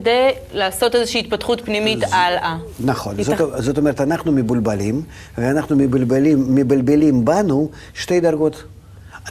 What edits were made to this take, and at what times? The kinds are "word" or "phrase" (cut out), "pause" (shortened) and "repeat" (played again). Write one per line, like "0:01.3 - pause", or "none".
none